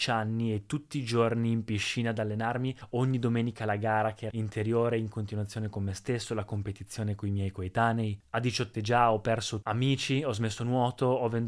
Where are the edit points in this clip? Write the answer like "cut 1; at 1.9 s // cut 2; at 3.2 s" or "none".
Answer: cut 1; at 4.3 s // cut 2; at 8.7 s // cut 3; at 9.6 s